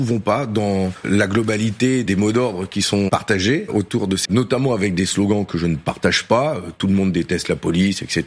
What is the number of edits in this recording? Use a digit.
1